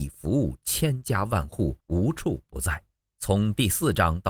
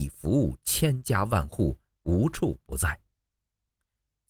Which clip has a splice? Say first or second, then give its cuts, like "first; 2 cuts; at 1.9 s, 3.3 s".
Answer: first; 2 cuts; at 1.8 s, 2.9 s